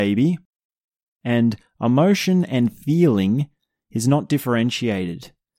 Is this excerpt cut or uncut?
uncut